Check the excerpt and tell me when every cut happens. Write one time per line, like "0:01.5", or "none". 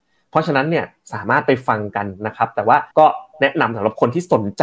0:02.9